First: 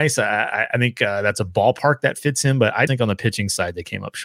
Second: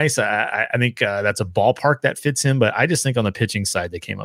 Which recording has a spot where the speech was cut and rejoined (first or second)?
first